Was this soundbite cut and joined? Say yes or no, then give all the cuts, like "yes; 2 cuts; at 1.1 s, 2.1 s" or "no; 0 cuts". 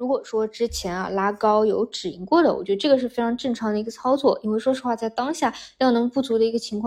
no; 0 cuts